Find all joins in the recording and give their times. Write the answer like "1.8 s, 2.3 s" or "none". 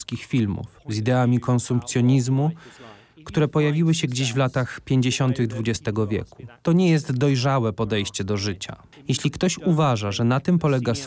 none